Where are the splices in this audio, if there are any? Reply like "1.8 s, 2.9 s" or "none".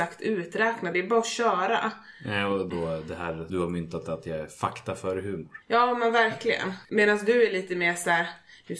0.9 s, 2.7 s, 3.5 s, 5.6 s, 6.8 s